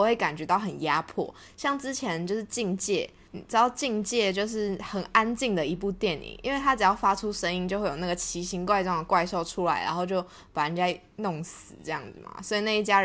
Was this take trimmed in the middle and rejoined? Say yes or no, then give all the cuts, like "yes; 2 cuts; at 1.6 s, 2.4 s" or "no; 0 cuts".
yes; 1 cut; at 3.3 s